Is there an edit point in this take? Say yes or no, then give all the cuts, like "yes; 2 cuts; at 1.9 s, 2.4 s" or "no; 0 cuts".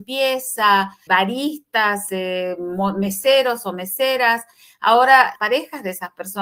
yes; 2 cuts; at 1.1 s, 5.4 s